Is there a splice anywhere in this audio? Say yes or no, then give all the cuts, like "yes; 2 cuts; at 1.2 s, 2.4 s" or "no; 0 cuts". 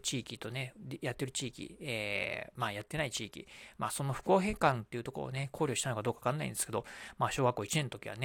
no; 0 cuts